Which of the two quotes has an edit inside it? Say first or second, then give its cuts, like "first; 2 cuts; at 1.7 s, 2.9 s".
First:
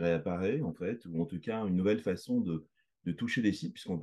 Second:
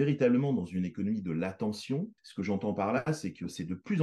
second; 1 cut; at 2.2 s